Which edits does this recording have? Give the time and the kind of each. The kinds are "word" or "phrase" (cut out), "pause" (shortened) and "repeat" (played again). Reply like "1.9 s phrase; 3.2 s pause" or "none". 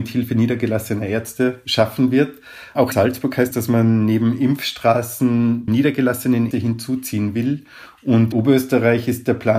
2.9 s word; 3.5 s word; 5.7 s word; 6.5 s word; 8.3 s word